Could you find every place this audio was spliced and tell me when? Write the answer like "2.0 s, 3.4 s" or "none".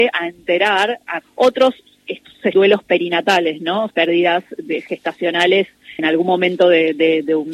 1.2 s, 2.5 s, 3.9 s, 6.0 s